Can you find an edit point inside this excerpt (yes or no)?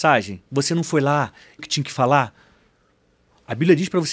yes